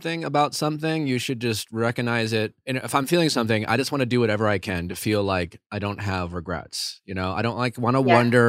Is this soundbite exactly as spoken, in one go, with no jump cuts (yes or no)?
yes